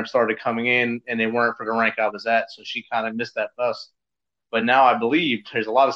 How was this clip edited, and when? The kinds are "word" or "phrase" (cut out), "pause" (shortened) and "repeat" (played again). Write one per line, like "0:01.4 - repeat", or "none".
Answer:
none